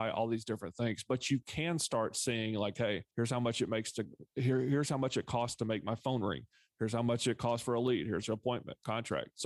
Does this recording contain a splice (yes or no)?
yes